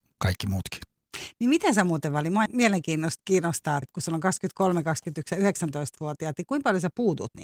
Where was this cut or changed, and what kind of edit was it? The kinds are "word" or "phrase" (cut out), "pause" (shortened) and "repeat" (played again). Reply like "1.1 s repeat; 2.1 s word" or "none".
2.5 s word; 3.8 s word